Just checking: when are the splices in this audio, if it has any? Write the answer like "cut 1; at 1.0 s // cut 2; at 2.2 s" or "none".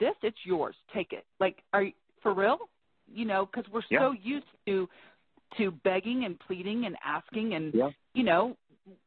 cut 1; at 1.3 s // cut 2; at 2.2 s

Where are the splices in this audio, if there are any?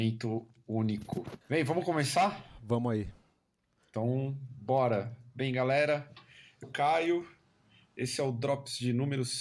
cut 1; at 1.4 s // cut 2; at 6.6 s

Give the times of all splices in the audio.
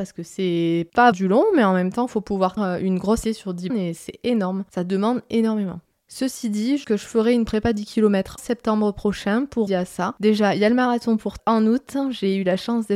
cut 1; at 1.1 s // cut 2; at 2.6 s // cut 3; at 3.2 s // cut 4; at 3.7 s // cut 5; at 6.8 s // cut 6; at 8.4 s // cut 7; at 9.7 s // cut 8; at 11.4 s

